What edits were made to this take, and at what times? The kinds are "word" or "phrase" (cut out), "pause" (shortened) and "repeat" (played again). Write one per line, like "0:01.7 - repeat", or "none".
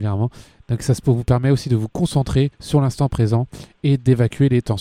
0:02.5 - pause